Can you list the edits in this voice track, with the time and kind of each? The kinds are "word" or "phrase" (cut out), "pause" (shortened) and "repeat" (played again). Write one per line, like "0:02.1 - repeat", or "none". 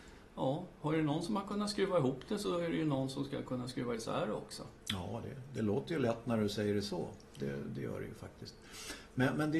none